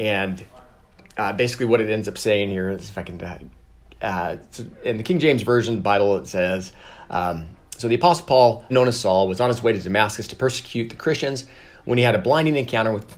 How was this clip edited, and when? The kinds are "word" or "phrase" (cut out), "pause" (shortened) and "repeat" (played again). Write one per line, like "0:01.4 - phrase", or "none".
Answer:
0:08.7 - word